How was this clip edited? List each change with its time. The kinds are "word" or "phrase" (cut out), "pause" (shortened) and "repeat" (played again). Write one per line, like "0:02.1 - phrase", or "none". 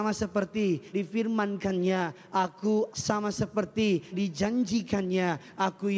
0:00.9 - word
0:02.9 - word
0:04.1 - word